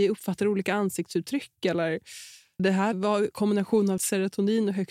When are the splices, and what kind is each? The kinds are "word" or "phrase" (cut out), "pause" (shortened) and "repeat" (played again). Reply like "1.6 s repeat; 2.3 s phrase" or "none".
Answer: 2.6 s word; 2.9 s word; 4.0 s word